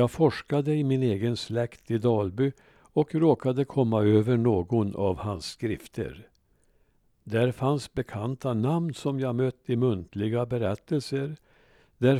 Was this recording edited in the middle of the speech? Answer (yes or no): no